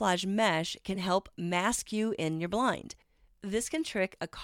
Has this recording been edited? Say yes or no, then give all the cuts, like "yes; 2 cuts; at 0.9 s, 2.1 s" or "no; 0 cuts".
no; 0 cuts